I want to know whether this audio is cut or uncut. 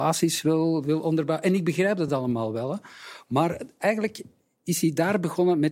uncut